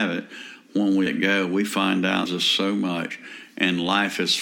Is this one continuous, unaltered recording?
no; 2 cuts; at 1.1 s, 2.3 s

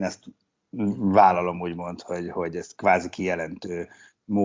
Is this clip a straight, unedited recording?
yes; 0 cuts

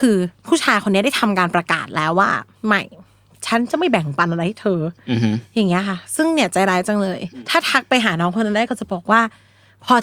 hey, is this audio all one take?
yes; 0 cuts

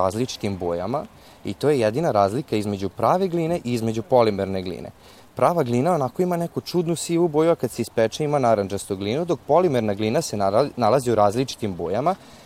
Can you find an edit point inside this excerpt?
no; 0 cuts

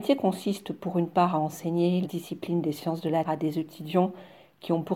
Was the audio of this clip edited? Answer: yes; 2 cuts; at 2.0 s, 3.2 s

